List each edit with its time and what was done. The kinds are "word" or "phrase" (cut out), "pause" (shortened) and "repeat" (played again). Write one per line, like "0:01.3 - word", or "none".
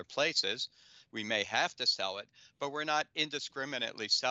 none